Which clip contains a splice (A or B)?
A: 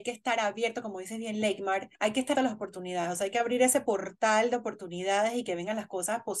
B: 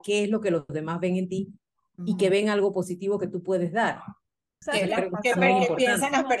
A